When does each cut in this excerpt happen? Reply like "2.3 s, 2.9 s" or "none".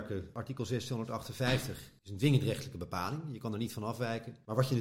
none